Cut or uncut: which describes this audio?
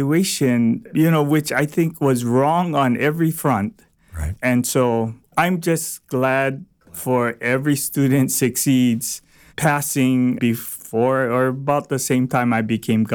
uncut